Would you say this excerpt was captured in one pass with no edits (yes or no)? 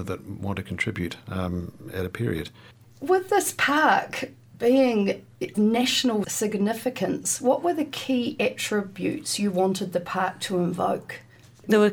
no